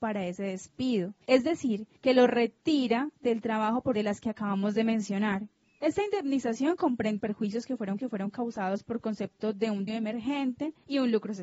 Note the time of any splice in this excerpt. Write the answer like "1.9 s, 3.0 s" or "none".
1.2 s, 3.9 s, 7.2 s, 8.0 s, 9.9 s